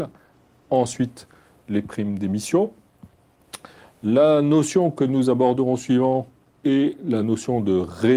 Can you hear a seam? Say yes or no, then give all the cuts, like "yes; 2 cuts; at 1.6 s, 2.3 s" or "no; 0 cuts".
no; 0 cuts